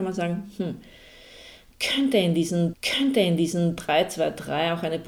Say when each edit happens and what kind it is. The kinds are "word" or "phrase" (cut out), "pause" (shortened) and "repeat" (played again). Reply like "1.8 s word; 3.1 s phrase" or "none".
2.7 s repeat